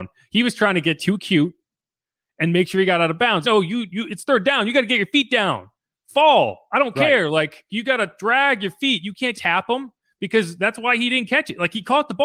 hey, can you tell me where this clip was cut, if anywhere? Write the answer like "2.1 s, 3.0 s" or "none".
3.4 s, 7.7 s, 9.3 s

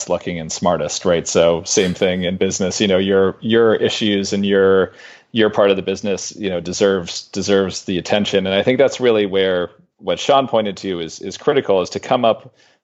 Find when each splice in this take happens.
none

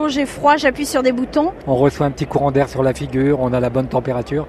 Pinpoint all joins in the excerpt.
none

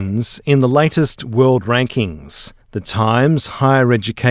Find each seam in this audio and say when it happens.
2.6 s

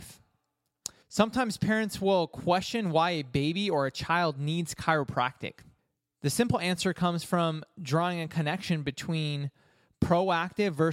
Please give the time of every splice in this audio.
1.0 s, 5.8 s

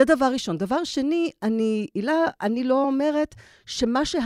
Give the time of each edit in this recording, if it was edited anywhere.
none

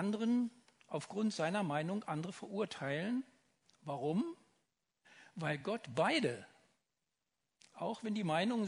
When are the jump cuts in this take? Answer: none

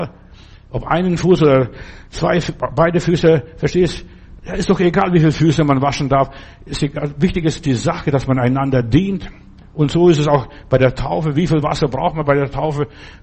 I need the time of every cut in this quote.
none

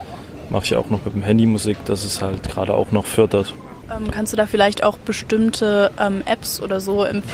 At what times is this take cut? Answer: none

